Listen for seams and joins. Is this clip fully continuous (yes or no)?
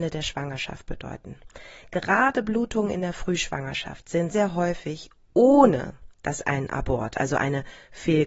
no